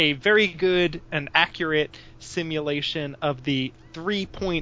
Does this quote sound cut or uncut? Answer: uncut